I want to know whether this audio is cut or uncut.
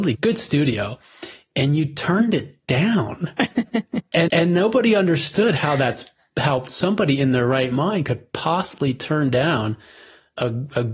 cut